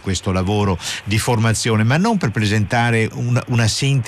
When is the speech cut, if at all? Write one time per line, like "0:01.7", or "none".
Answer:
0:03.1